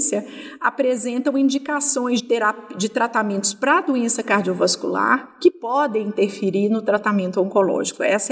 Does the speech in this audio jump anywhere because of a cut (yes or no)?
yes